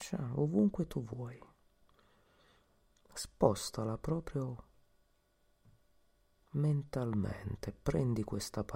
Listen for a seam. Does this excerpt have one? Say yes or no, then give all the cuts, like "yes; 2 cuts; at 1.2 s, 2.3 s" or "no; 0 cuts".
no; 0 cuts